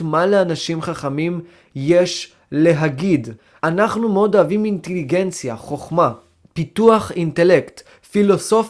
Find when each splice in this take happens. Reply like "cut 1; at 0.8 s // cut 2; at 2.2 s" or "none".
none